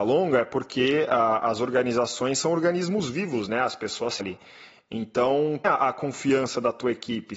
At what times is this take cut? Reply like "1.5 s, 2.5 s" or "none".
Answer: 4.2 s, 5.6 s